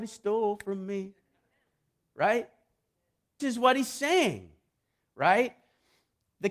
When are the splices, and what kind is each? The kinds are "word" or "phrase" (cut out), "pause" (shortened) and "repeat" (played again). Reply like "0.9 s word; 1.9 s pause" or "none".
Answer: 3.4 s word